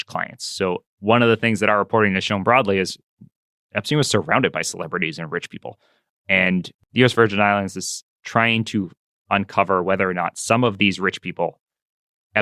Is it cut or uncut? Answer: cut